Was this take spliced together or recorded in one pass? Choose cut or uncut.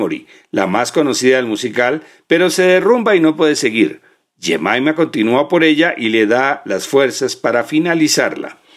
uncut